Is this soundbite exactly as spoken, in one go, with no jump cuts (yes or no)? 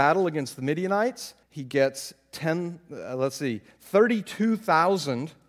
no